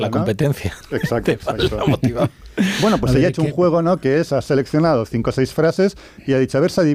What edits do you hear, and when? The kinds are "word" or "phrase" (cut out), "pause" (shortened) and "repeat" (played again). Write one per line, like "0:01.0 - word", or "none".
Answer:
none